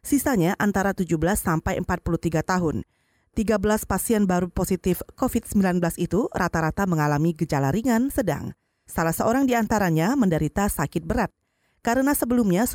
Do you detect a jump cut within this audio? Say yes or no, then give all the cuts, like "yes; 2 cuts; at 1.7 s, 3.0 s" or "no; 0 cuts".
yes; 1 cut; at 8.1 s